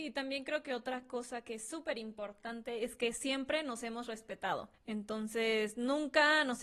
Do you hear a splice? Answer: no; 0 cuts

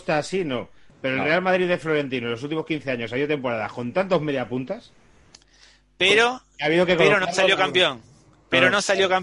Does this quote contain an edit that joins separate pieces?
no; 0 cuts

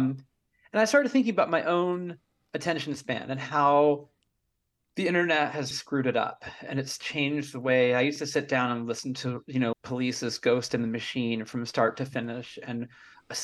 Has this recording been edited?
yes; 2 cuts; at 5.7 s, 9.7 s

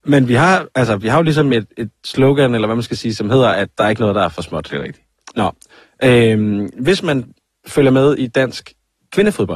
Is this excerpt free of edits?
yes; 0 cuts

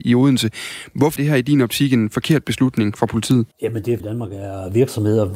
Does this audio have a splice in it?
yes; 3 cuts; at 1.2 s, 3.5 s, 4.0 s

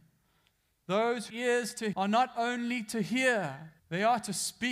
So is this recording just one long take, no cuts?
no; 3 cuts; at 1.3 s, 1.9 s, 3.8 s

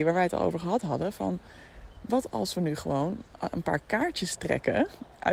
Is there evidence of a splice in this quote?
yes; 1 cut; at 3.5 s

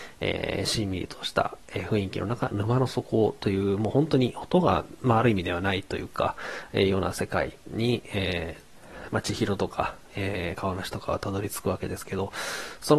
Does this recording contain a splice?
yes; 1 cut; at 7.6 s

